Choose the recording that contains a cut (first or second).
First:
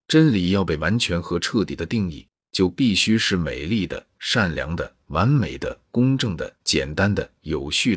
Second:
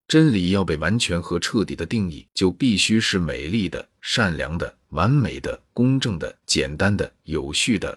second